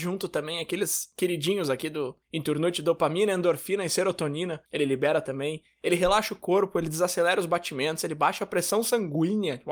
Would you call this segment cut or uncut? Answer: cut